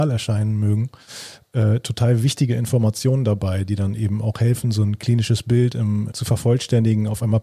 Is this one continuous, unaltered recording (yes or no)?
no